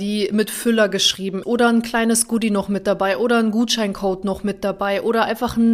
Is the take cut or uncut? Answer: cut